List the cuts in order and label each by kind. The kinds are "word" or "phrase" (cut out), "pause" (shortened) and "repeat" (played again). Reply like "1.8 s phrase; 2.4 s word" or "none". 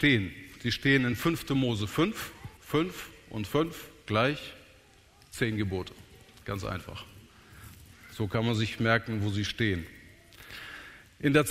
2.6 s pause